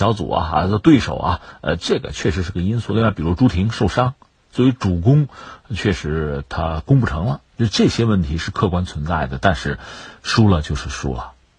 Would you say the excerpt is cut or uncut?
uncut